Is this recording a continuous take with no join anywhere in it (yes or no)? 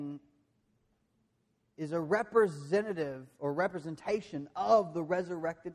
yes